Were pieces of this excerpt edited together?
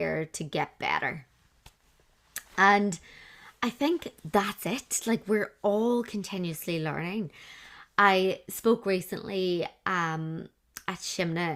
yes; 1 cut; at 4.2 s

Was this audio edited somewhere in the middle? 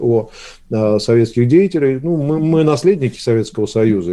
no; 0 cuts

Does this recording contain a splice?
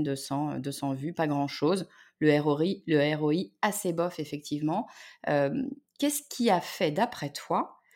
no; 0 cuts

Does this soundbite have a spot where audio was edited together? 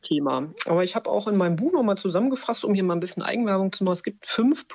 no; 0 cuts

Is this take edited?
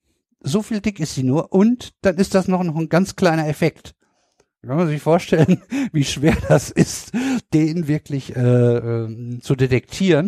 no; 0 cuts

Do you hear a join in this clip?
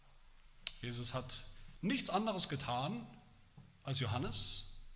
yes; 1 cut; at 1.7 s

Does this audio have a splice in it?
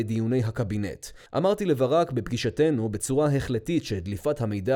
yes; 1 cut; at 1.3 s

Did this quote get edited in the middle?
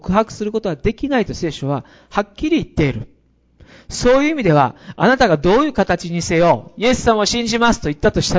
no; 0 cuts

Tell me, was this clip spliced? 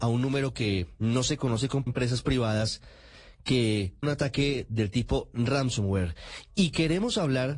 yes; 2 cuts; at 1.9 s, 4.0 s

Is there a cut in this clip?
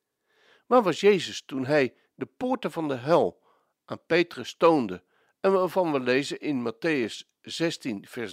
no; 0 cuts

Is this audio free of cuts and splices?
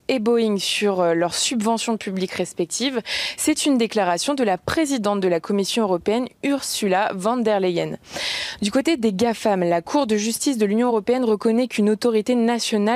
yes; 0 cuts

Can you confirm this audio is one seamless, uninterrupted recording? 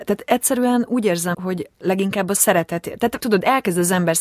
no; 3 cuts; at 1.3 s, 1.7 s, 3.2 s

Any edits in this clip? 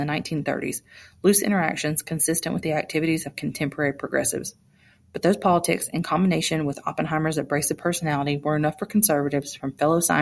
no; 0 cuts

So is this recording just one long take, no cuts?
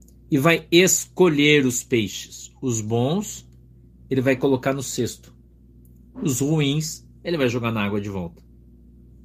yes; 0 cuts

